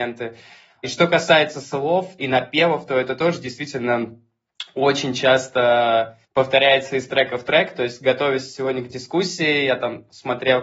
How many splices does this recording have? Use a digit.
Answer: 1